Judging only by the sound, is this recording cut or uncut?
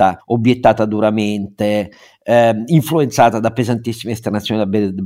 uncut